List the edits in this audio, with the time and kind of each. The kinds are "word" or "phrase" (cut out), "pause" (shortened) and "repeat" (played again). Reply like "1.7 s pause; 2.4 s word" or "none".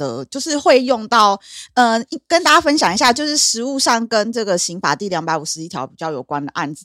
none